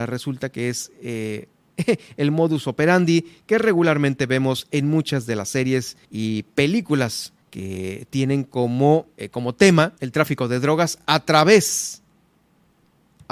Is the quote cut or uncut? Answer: cut